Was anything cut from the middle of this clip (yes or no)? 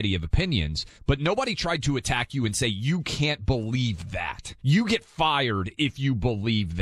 yes